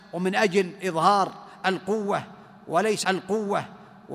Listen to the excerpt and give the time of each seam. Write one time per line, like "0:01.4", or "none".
0:03.0

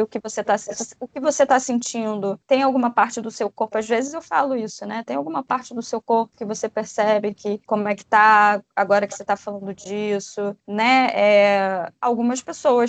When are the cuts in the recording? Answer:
none

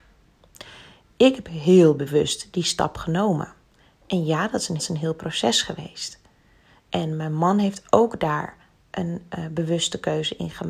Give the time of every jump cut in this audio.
0:04.8

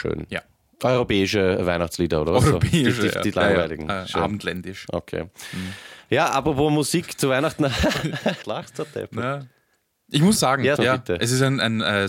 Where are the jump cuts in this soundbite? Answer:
0:08.4
0:10.4
0:10.8

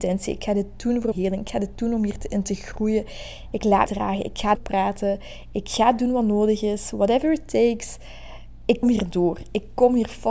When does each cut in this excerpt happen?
0:01.1
0:03.9
0:04.5
0:08.8

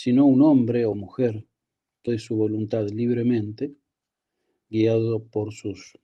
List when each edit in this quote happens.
0:00.9
0:02.1

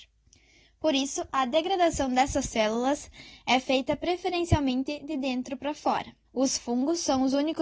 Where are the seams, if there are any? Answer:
0:06.2

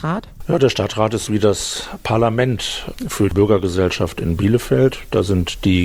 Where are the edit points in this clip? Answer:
0:01.3
0:03.3

